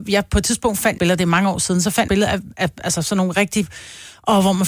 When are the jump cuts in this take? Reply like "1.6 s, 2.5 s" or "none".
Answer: 1.0 s, 2.1 s